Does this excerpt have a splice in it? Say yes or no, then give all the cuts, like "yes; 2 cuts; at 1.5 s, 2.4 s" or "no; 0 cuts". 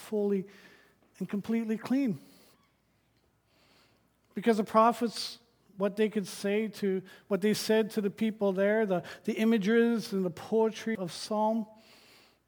yes; 1 cut; at 10.9 s